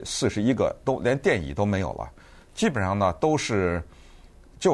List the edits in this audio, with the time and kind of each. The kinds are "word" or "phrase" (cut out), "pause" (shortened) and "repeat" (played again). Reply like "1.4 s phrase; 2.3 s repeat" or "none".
none